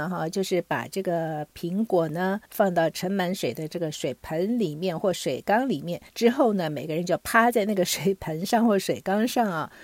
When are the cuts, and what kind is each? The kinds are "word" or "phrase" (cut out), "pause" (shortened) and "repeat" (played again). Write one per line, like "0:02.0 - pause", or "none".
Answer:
0:02.5 - pause
0:06.1 - pause